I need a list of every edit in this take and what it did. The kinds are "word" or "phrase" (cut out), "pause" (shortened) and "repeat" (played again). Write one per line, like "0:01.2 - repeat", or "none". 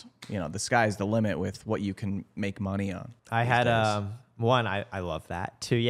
0:03.2 - pause